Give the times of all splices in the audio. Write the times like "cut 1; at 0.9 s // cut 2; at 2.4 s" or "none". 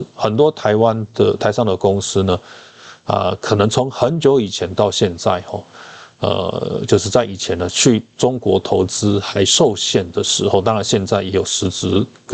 none